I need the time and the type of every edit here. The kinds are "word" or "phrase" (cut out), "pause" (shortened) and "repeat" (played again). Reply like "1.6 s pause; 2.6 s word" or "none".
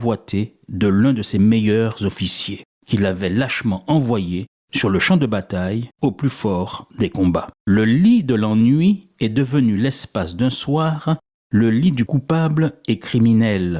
5.9 s pause; 7.5 s pause; 12.1 s word